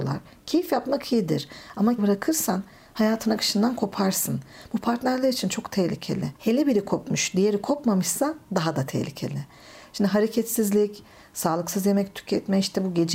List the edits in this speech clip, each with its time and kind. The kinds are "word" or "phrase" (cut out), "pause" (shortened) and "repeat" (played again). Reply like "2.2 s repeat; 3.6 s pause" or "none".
2.0 s word; 6.4 s pause